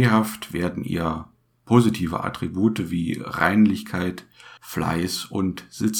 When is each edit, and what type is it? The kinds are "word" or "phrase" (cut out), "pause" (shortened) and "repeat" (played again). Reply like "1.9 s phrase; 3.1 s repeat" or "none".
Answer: 4.6 s pause